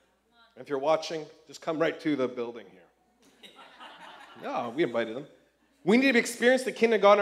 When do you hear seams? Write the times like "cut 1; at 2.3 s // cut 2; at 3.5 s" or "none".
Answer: none